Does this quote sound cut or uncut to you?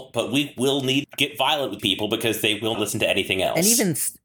cut